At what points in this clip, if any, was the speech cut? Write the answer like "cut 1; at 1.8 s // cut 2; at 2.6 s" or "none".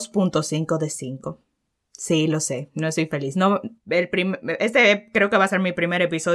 cut 1; at 1.7 s // cut 2; at 3.8 s